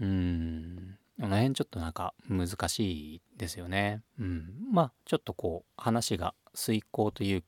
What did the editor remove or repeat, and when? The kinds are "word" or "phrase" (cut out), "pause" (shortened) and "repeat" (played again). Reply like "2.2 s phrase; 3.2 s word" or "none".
4.1 s pause